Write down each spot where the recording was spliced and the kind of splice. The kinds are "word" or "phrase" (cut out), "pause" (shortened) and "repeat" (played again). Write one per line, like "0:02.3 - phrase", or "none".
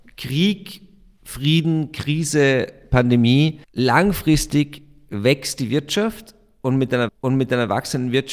0:03.6 - pause
0:07.1 - repeat

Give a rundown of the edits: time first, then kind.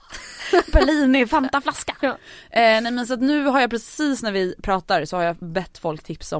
none

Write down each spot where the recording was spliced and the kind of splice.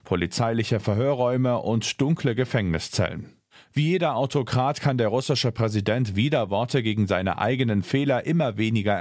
none

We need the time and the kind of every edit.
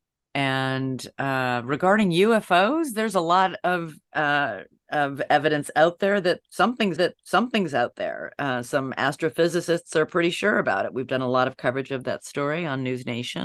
0:07.0 - repeat

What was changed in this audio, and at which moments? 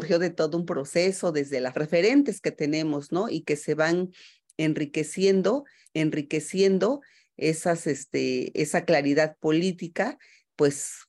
0:01.7 - phrase
0:05.8 - repeat

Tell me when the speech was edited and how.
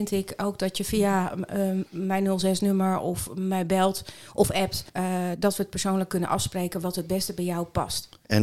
0:01.9 - pause
0:04.9 - pause

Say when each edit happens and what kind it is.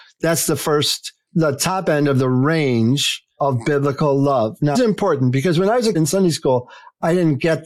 0:04.7 - phrase
0:05.9 - word

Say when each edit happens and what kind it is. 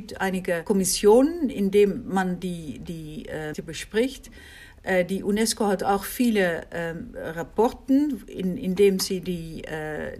0:03.5 - word

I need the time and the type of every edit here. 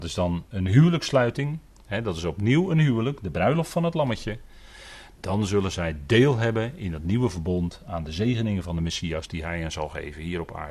none

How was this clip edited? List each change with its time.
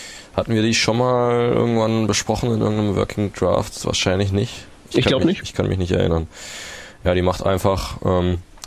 0:04.8 - pause

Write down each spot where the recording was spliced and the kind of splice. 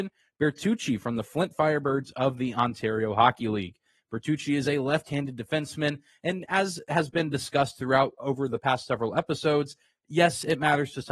none

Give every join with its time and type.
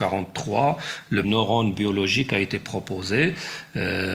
0:01.2 - phrase

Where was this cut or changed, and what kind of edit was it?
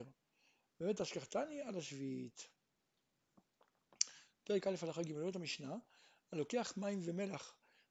none

